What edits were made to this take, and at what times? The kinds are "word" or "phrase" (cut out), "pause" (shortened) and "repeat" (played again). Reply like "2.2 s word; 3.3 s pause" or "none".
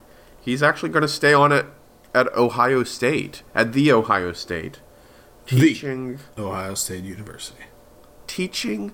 none